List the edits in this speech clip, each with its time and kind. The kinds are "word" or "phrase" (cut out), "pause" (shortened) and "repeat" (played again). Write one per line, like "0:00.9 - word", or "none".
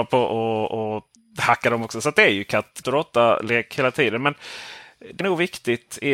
0:01.2 - pause
0:02.8 - word
0:05.2 - word